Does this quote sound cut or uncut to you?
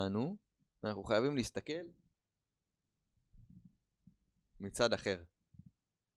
uncut